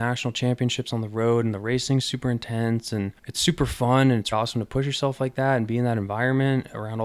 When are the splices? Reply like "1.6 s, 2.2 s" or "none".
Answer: 3.2 s, 4.3 s